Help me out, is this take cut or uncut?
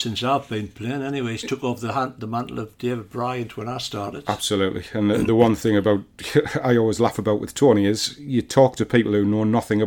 uncut